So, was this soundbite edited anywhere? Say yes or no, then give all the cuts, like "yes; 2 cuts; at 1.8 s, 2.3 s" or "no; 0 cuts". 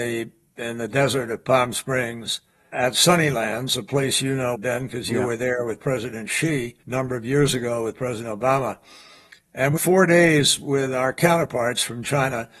yes; 4 cuts; at 2.7 s, 4.5 s, 6.8 s, 9.8 s